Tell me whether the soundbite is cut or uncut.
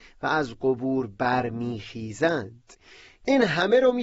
uncut